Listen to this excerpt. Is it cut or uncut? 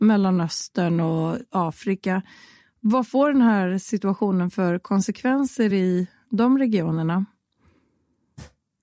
uncut